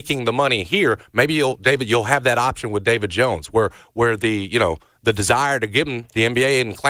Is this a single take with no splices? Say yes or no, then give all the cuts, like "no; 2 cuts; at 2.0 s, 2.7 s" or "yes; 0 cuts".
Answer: yes; 0 cuts